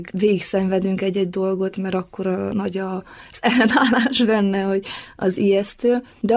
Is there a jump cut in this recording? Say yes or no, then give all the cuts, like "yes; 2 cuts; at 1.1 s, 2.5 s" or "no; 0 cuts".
no; 0 cuts